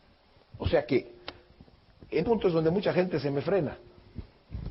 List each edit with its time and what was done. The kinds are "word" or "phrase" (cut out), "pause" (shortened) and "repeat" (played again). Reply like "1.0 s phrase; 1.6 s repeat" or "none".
2.2 s word